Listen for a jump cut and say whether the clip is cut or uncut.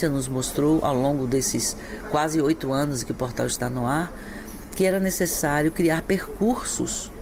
uncut